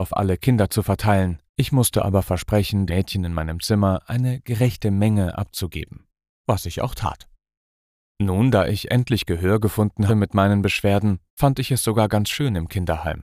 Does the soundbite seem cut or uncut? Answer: cut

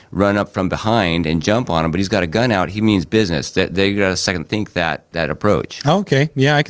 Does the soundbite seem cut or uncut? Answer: uncut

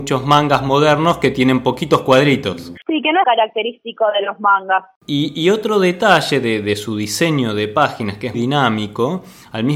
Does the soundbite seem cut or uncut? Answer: cut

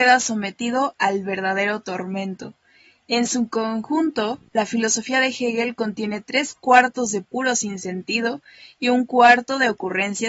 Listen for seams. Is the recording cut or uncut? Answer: uncut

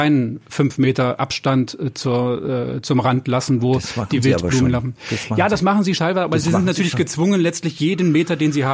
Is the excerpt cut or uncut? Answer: cut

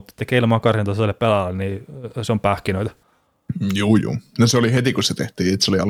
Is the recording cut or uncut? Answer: uncut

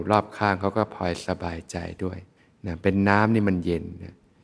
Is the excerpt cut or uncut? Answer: cut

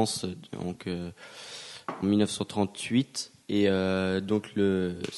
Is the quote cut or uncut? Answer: cut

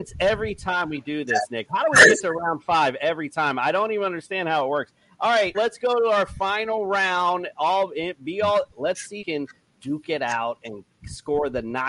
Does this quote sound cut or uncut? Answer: cut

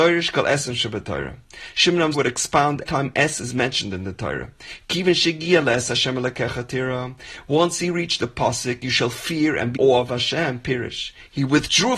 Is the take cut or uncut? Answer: cut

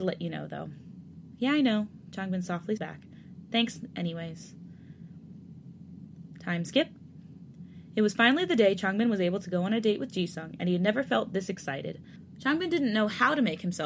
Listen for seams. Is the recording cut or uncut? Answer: cut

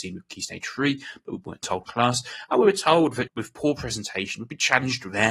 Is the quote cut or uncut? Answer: cut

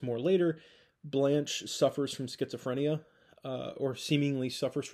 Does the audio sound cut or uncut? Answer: uncut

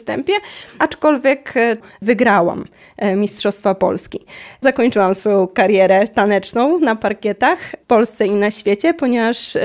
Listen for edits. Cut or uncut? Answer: uncut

